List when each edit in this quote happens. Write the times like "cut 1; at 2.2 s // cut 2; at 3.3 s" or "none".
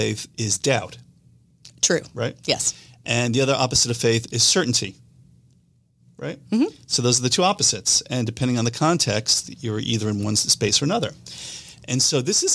none